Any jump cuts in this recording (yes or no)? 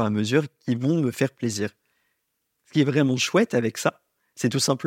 no